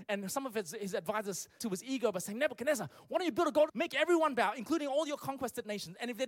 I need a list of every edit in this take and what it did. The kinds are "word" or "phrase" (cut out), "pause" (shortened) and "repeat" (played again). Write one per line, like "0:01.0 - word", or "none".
0:01.6 - word
0:03.7 - word